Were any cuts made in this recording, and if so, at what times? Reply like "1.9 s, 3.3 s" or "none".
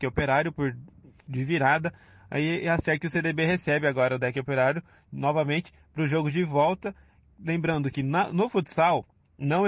none